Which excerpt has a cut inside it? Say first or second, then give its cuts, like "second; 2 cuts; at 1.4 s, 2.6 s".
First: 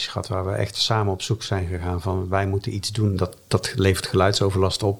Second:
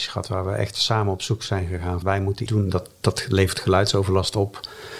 second; 2 cuts; at 2.0 s, 2.5 s